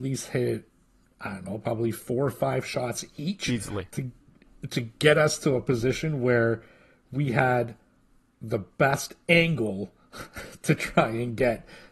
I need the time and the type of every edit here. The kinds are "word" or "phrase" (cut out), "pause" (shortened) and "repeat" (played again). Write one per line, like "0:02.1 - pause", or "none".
none